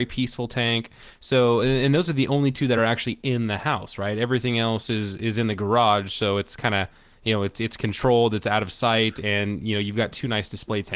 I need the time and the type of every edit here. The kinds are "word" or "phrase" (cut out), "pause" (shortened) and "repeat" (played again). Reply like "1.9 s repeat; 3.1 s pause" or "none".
none